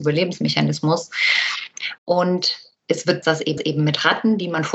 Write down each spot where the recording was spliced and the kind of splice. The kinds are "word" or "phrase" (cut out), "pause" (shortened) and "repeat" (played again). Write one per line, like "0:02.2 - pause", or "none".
0:02.0 - pause
0:03.2 - phrase
0:03.6 - repeat